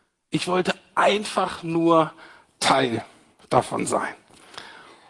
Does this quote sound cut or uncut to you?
uncut